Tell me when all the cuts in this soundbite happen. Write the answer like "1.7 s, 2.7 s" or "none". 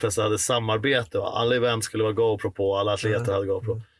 none